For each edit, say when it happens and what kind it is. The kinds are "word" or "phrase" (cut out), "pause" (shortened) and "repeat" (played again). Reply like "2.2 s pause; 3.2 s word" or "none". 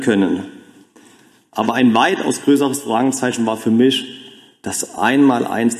none